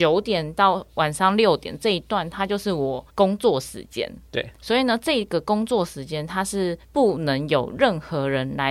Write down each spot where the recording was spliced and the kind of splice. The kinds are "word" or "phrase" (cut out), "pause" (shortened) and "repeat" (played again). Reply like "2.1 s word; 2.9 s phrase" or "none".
3.1 s pause; 4.5 s pause; 6.8 s pause